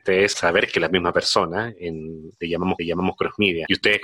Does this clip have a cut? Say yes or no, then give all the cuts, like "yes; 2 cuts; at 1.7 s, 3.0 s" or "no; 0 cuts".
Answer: yes; 1 cut; at 2.8 s